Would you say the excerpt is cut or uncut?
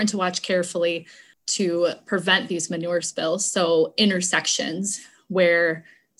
uncut